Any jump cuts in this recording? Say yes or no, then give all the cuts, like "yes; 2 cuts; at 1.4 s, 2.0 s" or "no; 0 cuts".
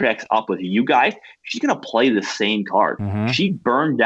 no; 0 cuts